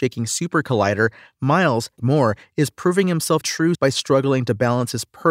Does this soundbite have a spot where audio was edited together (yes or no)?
yes